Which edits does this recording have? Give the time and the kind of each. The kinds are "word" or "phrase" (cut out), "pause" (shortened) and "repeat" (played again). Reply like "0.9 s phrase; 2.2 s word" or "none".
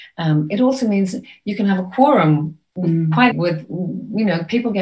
3.3 s word

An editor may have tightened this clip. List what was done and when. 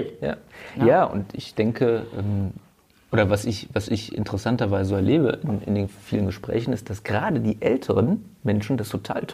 none

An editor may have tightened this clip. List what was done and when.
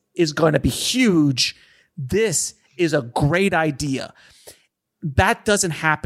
none

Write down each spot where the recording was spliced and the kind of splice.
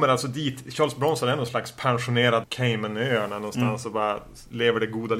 2.4 s phrase

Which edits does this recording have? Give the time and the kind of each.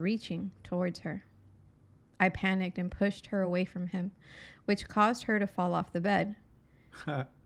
none

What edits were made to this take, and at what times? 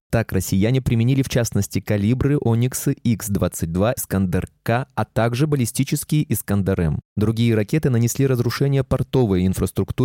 4.0 s word

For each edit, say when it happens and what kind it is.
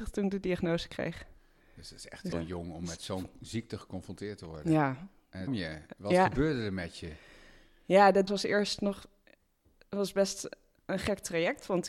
2.3 s word; 5.5 s word; 8.3 s word

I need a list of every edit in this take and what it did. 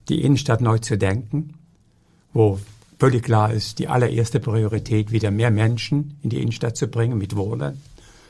none

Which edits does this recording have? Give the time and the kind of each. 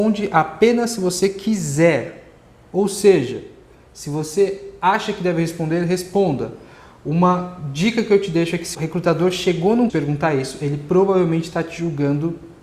8.7 s word; 9.9 s phrase

